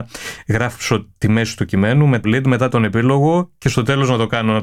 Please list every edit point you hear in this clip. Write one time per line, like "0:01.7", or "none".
0:02.2